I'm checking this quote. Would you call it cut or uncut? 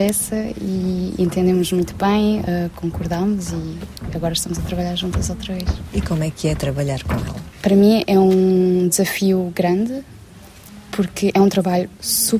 uncut